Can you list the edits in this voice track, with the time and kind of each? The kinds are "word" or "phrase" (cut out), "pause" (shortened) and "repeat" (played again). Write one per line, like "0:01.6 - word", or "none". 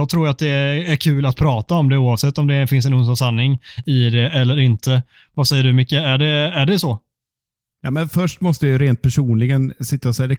none